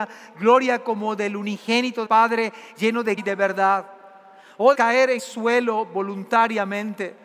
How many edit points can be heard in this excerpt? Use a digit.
4